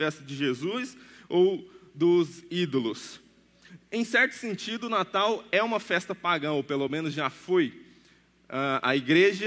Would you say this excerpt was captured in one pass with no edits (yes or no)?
yes